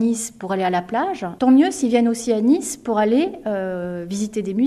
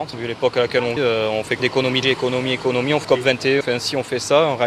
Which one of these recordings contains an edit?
second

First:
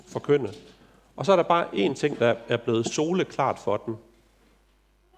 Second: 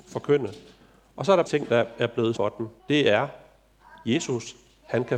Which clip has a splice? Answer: second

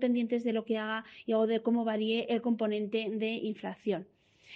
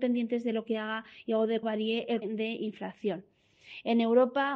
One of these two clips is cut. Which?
second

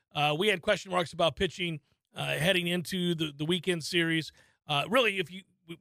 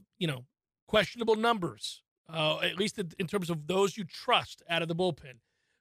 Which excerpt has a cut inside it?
second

